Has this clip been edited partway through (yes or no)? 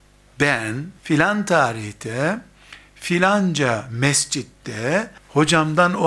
yes